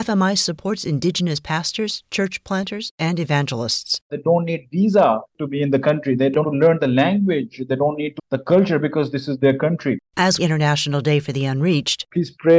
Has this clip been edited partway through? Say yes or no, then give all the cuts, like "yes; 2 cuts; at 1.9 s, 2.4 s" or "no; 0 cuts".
yes; 3 cuts; at 6.4 s, 8.2 s, 10.4 s